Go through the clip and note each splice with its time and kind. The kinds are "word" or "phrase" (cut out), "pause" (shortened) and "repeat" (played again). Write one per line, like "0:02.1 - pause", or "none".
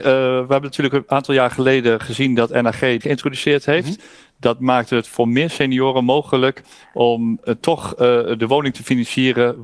0:03.0 - word